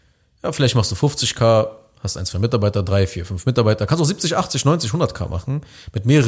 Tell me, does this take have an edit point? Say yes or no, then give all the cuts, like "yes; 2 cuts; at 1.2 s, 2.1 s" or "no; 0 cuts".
no; 0 cuts